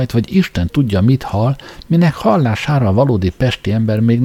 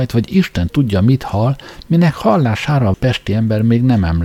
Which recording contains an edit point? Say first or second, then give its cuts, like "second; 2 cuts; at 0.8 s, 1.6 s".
second; 1 cut; at 2.9 s